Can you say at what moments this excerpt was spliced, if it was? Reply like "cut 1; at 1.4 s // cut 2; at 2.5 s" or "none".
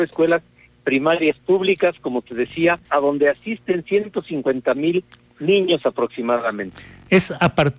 cut 1; at 2.9 s

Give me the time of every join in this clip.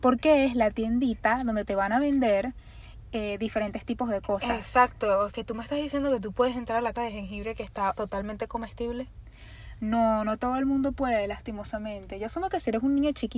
cut 1; at 5.3 s // cut 2; at 6.9 s // cut 3; at 7.9 s

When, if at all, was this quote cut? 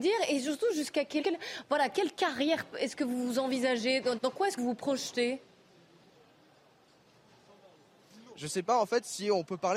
cut 1; at 1.2 s // cut 2; at 2.7 s // cut 3; at 4.2 s // cut 4; at 4.6 s

